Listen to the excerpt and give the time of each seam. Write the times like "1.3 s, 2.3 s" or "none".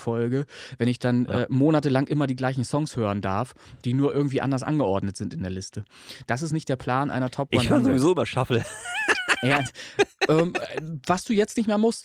none